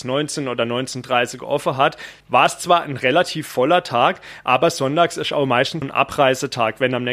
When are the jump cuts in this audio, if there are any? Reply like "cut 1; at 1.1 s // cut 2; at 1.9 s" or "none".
cut 1; at 2.2 s // cut 2; at 5.8 s

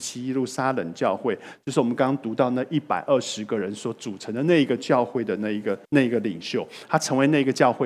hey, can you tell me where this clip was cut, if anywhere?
cut 1; at 5.8 s

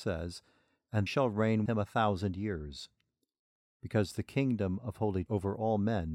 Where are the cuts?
cut 1; at 1.1 s // cut 2; at 1.7 s // cut 3; at 5.3 s

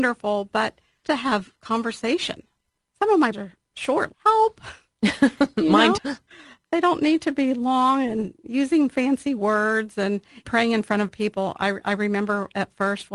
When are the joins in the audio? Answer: cut 1; at 1.0 s // cut 2; at 3.3 s // cut 3; at 4.1 s // cut 4; at 6.0 s // cut 5; at 10.4 s // cut 6; at 11.1 s

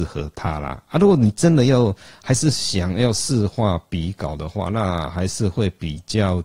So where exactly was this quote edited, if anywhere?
none

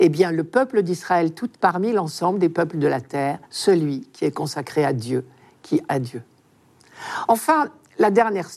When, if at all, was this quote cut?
cut 1; at 1.5 s // cut 2; at 3.4 s // cut 3; at 5.9 s

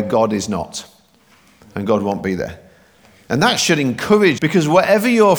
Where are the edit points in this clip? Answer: cut 1; at 4.4 s

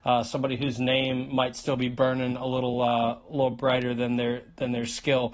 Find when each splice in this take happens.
none

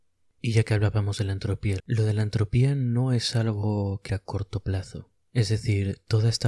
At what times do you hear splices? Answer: cut 1; at 1.8 s // cut 2; at 4.1 s

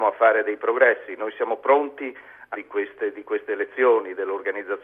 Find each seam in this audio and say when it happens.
cut 1; at 2.5 s

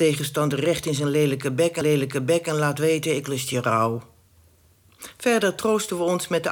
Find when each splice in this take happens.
cut 1; at 1.8 s

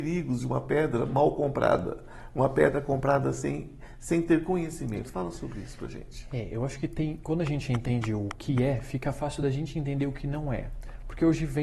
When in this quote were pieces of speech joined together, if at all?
none

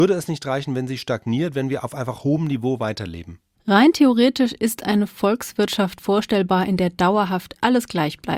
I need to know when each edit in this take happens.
none

